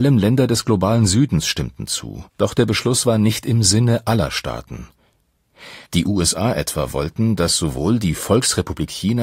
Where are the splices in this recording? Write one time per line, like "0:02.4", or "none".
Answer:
0:02.3
0:05.8